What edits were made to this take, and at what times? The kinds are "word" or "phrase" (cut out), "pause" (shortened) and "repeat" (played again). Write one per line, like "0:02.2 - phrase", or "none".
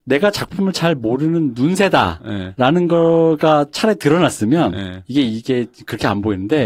none